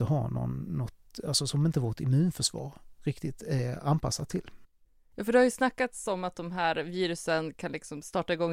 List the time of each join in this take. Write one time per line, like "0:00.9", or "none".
none